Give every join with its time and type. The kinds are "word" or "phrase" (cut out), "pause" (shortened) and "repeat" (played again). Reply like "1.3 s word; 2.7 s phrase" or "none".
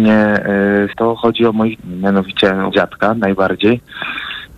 0.9 s phrase; 1.8 s word; 2.7 s word